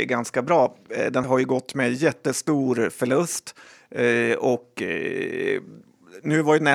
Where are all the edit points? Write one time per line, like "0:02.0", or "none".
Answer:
0:01.2